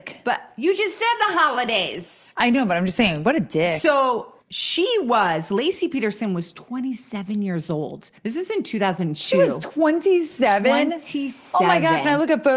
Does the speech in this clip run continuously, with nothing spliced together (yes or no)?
no